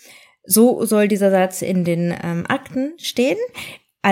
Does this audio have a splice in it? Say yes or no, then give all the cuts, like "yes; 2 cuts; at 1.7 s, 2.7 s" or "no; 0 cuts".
no; 0 cuts